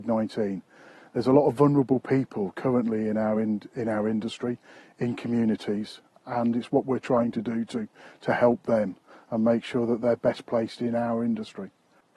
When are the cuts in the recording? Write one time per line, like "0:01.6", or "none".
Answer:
none